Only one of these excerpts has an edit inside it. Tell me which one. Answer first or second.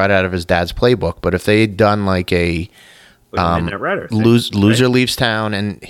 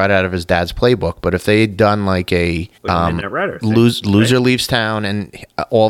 second